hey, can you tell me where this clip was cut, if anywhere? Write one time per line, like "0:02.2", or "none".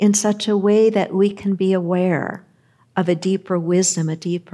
none